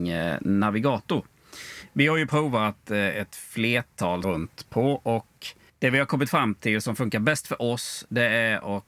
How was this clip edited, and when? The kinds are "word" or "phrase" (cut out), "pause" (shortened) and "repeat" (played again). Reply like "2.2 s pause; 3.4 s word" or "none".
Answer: 4.2 s phrase; 5.7 s pause